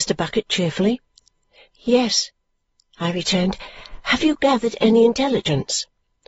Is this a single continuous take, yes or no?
yes